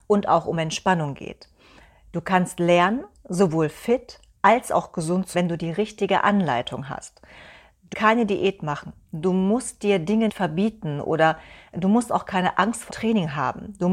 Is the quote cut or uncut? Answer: cut